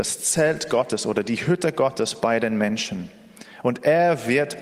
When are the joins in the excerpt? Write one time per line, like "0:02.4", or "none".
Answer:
none